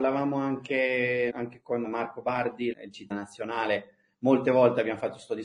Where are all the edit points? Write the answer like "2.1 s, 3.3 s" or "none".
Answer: 1.3 s, 1.8 s, 2.7 s, 3.1 s